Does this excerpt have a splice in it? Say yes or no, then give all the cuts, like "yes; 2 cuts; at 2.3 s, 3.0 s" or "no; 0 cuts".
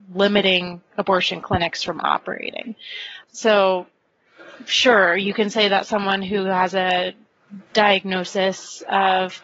yes; 1 cut; at 3.2 s